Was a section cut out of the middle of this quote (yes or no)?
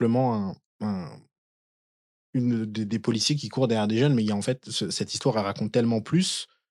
no